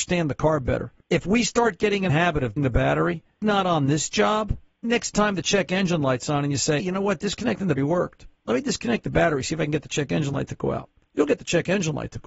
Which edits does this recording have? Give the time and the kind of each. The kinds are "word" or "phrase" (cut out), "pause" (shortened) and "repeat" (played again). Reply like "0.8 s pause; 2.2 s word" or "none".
1.0 s pause; 2.1 s word; 2.6 s word; 3.4 s word; 4.8 s word; 6.8 s word; 7.8 s word